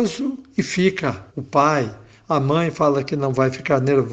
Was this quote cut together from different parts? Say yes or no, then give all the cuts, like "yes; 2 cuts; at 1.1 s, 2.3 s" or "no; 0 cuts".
yes; 1 cut; at 1.3 s